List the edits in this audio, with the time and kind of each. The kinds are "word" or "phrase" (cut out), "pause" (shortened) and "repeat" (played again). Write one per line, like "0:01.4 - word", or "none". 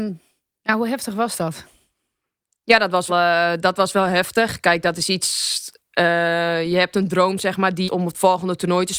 0:03.1 - word
0:07.9 - phrase